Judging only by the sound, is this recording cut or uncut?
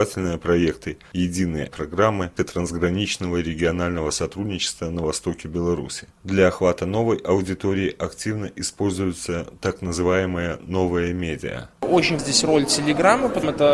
cut